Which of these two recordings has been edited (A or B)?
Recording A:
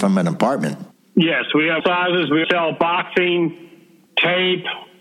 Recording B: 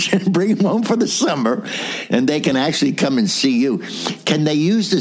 A